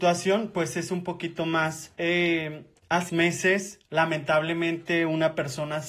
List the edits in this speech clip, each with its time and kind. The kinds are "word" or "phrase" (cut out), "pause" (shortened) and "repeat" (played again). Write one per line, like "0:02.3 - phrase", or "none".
0:03.1 - word